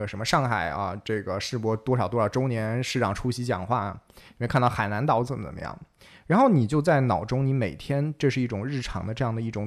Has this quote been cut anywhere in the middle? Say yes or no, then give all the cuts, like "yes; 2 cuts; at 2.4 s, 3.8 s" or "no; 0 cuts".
no; 0 cuts